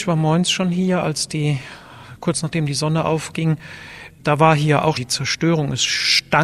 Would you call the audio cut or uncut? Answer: cut